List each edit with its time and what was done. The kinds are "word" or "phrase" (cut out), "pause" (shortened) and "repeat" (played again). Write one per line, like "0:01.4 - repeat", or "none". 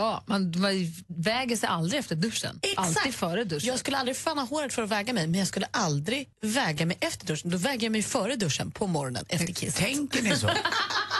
0:01.1 - pause
0:06.3 - pause